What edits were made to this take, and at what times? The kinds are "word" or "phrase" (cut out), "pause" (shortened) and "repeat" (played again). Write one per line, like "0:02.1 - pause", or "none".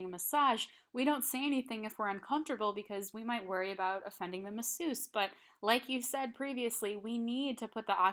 none